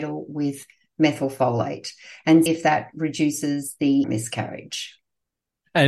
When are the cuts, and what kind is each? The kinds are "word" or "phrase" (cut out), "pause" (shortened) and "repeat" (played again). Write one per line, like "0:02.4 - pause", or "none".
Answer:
0:02.5 - word
0:04.0 - phrase